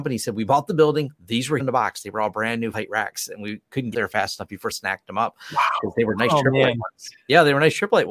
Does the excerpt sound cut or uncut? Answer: cut